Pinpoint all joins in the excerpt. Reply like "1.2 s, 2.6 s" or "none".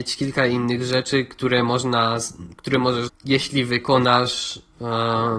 3.1 s

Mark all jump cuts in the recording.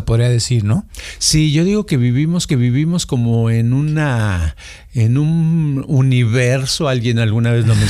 2.5 s

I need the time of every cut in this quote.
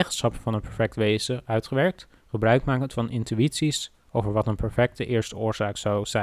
2.2 s

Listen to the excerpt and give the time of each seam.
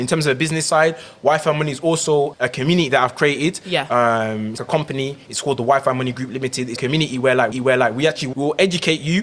2.3 s, 4.6 s, 6.8 s, 7.5 s, 8.3 s

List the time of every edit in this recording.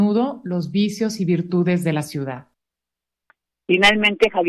none

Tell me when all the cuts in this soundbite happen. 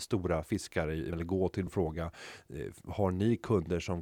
1.1 s, 1.7 s

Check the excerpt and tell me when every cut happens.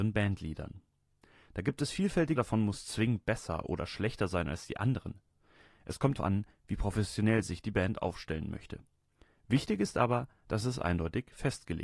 2.4 s, 6.2 s

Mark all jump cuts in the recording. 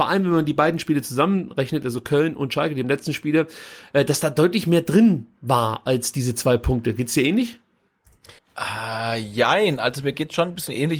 2.8 s, 8.4 s

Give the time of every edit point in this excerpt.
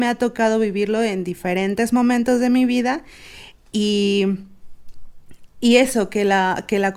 none

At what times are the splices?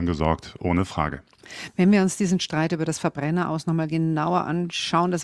none

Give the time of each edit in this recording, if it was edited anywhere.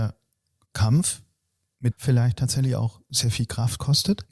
1.9 s

